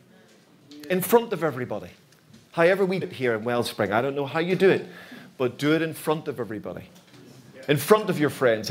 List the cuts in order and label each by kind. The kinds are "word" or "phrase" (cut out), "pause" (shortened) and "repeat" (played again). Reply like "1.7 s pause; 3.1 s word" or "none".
2.1 s pause; 3.0 s word